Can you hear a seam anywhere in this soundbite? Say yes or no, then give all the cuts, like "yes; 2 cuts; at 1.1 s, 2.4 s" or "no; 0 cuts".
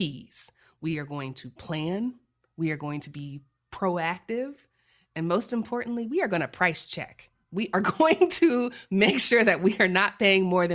no; 0 cuts